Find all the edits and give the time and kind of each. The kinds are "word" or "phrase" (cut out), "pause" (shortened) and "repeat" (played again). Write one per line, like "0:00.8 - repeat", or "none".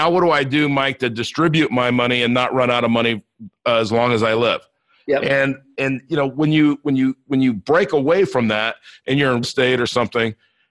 0:09.4 - word